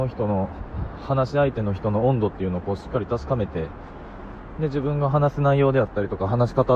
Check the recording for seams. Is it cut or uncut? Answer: uncut